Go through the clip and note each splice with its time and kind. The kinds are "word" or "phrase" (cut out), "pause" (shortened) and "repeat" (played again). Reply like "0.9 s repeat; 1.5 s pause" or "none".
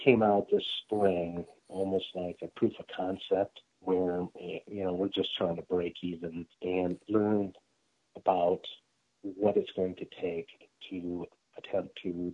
3.7 s pause; 6.5 s pause